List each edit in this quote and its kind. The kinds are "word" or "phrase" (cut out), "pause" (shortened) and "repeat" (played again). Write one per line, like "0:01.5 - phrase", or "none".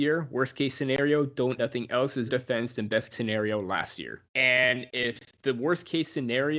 0:01.6 - word
0:02.3 - word
0:03.1 - word
0:04.3 - pause